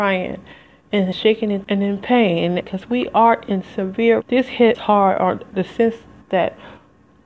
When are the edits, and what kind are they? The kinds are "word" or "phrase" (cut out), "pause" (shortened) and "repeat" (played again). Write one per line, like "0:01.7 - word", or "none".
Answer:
0:01.1 - word
0:01.6 - word
0:02.6 - word
0:04.2 - word
0:04.7 - word